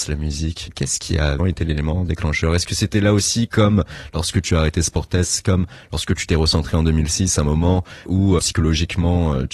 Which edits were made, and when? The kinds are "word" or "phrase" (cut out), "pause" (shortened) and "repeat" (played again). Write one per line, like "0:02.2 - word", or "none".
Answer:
0:01.4 - word
0:08.4 - word